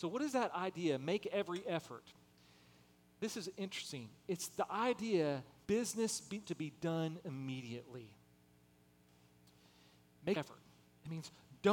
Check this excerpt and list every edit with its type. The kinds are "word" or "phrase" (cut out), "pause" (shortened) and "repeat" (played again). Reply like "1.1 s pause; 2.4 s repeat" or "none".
5.6 s word; 6.4 s word; 10.4 s word